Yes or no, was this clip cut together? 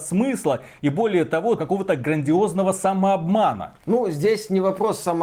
yes